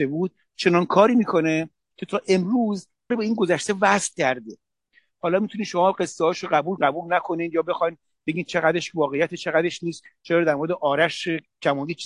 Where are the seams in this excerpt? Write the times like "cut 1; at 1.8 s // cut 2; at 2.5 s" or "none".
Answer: cut 1; at 3.1 s // cut 2; at 6.8 s